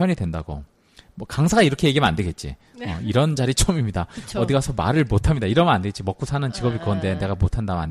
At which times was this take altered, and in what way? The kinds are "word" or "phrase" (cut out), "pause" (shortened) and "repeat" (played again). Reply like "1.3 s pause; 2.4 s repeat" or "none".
none